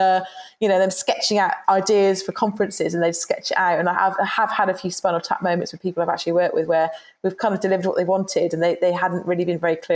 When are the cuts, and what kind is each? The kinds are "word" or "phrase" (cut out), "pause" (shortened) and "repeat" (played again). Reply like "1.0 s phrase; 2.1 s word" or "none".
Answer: none